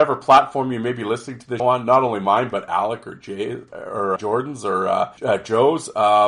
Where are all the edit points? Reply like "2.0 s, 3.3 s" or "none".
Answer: 1.6 s, 4.2 s, 5.2 s